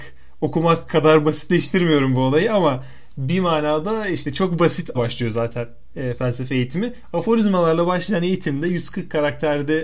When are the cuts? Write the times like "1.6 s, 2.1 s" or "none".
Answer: 4.9 s

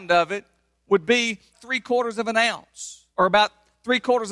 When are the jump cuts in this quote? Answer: 1.5 s, 3.1 s

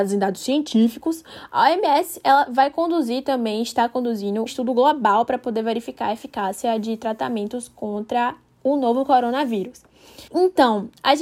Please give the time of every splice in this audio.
4.5 s, 10.3 s

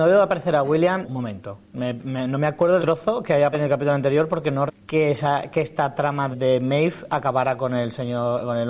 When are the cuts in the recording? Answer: 1.0 s, 1.6 s, 2.8 s, 3.5 s, 4.7 s, 6.3 s

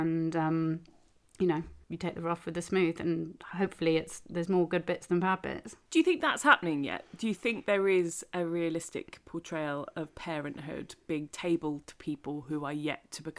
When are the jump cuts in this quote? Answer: 1.8 s, 5.9 s

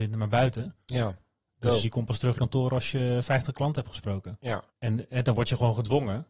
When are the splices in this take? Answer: 1.8 s, 2.4 s, 4.7 s

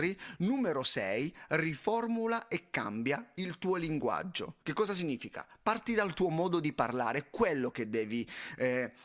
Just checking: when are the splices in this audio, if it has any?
4.6 s

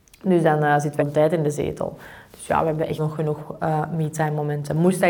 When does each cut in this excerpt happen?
1.0 s, 3.0 s

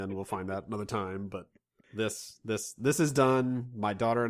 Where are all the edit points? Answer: none

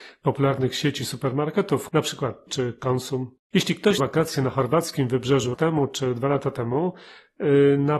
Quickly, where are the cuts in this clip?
1.9 s, 2.5 s, 4.0 s, 5.5 s

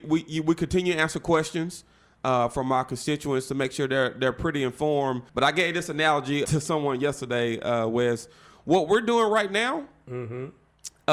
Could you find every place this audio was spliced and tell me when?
5.3 s, 6.4 s

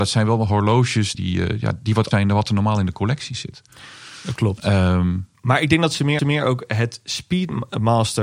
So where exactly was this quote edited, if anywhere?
1.1 s, 2.1 s, 6.2 s

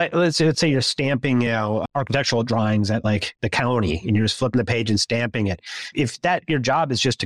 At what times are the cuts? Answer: none

